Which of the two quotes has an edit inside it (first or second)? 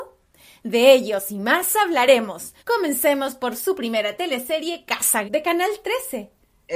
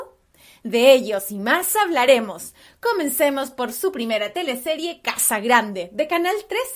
first